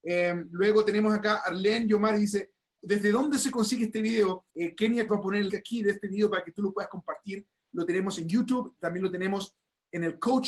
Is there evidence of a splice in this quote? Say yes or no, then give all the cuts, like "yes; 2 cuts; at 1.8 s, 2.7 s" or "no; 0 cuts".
yes; 4 cuts; at 2.8 s, 4.5 s, 5.1 s, 5.5 s